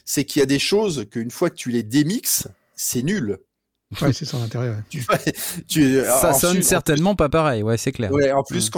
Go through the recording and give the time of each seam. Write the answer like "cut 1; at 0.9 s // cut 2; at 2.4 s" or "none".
none

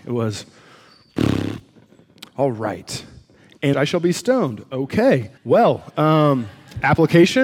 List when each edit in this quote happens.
cut 1; at 2.3 s // cut 2; at 3.7 s // cut 3; at 5.4 s

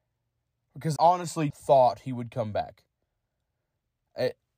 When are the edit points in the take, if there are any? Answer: cut 1; at 1.0 s // cut 2; at 1.5 s

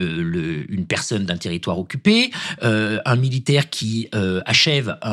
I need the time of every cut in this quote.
none

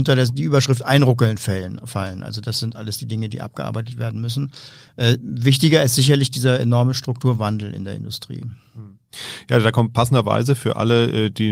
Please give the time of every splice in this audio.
none

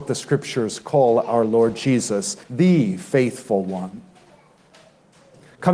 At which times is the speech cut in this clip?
cut 1; at 2.4 s

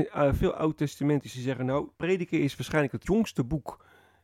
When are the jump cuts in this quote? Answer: cut 1; at 1.3 s // cut 2; at 1.9 s // cut 3; at 3.0 s

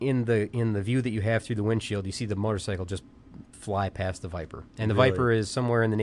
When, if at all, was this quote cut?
cut 1; at 4.7 s

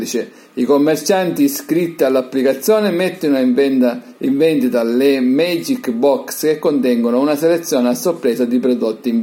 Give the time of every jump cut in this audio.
none

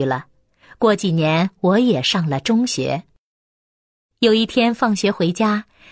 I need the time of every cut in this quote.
none

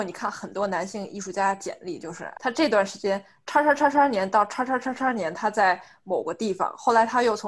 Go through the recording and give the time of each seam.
cut 1; at 2.4 s

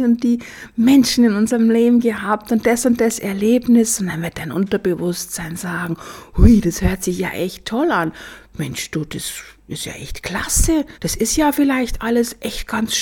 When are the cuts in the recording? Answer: cut 1; at 10.9 s

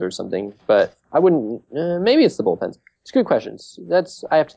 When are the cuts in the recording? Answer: none

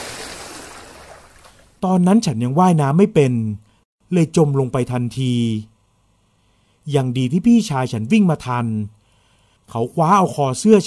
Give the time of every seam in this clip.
none

